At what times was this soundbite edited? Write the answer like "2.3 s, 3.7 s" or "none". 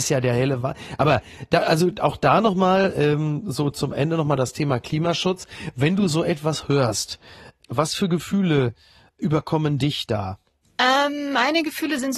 none